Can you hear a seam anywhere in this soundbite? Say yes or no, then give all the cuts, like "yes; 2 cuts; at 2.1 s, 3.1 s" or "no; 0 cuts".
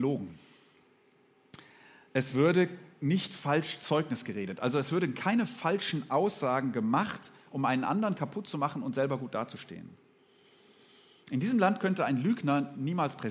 no; 0 cuts